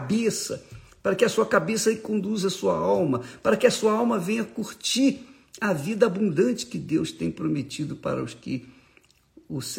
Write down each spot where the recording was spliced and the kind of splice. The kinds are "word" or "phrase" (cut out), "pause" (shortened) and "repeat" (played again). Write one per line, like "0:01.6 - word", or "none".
none